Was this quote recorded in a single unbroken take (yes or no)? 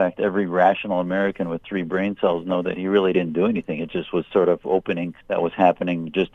no